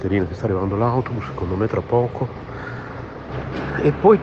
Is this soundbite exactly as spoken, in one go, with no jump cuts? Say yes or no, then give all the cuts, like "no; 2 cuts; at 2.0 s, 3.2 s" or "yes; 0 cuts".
yes; 0 cuts